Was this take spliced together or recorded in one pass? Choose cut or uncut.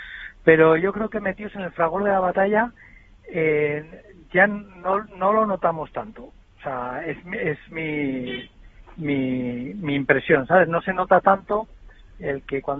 uncut